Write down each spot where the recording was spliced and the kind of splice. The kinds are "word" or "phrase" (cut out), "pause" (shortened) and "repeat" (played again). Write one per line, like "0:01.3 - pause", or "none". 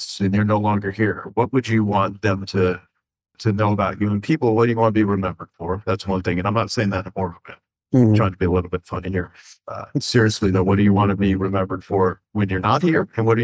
none